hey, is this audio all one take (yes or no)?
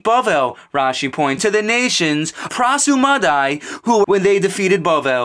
no